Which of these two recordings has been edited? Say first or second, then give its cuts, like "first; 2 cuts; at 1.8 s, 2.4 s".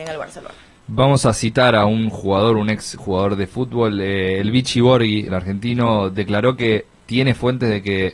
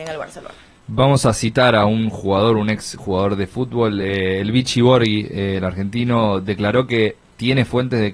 first; 1 cut; at 5.3 s